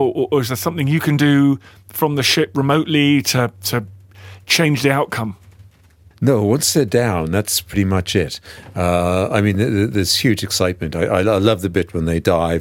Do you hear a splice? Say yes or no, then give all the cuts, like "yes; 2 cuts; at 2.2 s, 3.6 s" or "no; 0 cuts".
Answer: no; 0 cuts